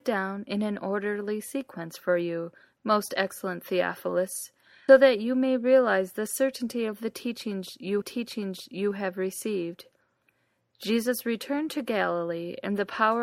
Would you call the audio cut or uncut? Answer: cut